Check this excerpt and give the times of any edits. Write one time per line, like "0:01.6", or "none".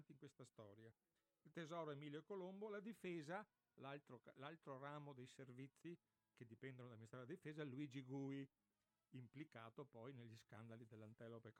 none